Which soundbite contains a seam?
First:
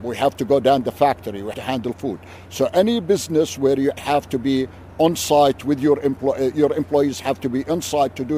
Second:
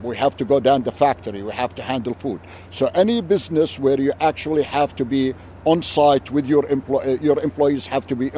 first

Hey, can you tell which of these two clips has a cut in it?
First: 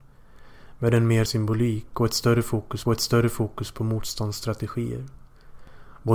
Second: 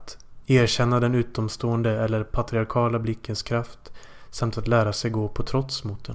first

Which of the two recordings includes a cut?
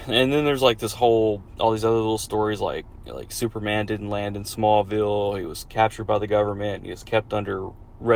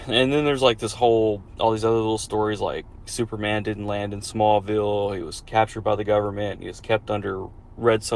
second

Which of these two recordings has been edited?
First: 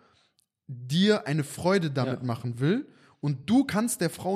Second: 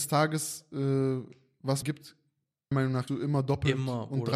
second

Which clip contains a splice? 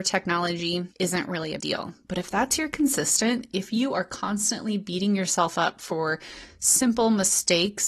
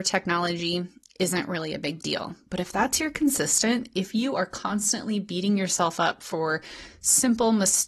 first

